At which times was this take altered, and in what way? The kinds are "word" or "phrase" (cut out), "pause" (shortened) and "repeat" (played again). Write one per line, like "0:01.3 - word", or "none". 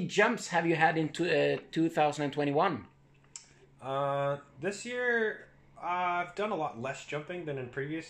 none

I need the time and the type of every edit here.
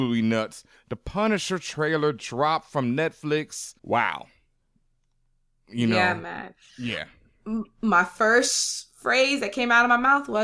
0:03.8 - pause

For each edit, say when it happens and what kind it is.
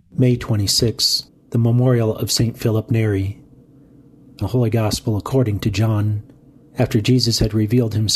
0:01.3 - pause
0:04.4 - phrase
0:06.5 - pause

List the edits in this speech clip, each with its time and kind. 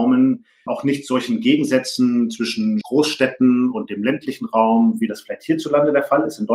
none

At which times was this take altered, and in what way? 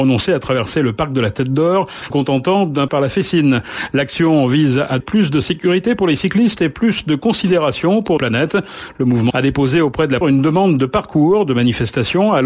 0:02.1 - word
0:02.9 - word
0:05.0 - word
0:08.2 - word
0:09.3 - word
0:10.2 - word

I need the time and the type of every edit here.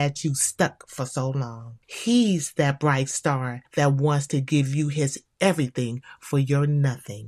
0:01.8 - pause
0:03.6 - pause

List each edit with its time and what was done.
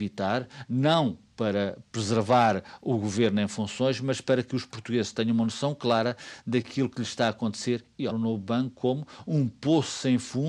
0:08.1 - phrase

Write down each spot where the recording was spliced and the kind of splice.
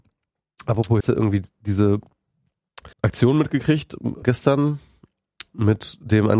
0:01.0 - phrase
0:02.9 - pause
0:04.2 - word

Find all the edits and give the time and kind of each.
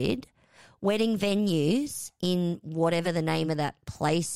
none

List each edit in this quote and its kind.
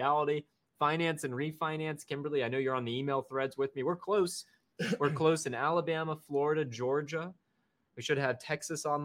none

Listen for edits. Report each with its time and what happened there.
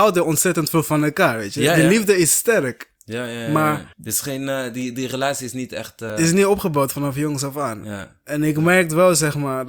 0:03.9 - pause

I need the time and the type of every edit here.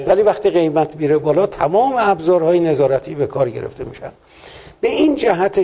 none

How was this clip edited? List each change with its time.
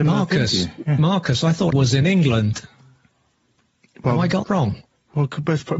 0:01.7 - word
0:04.4 - word

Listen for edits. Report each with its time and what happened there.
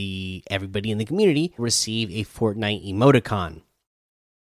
0:01.6 - word

